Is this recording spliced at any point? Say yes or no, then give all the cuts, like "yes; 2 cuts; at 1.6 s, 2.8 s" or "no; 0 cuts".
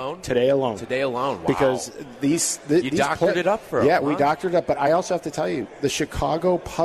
no; 0 cuts